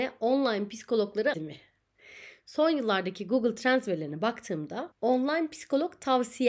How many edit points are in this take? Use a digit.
2